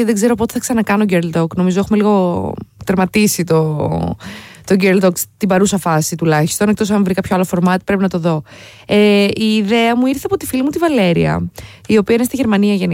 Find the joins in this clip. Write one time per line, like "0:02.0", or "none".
none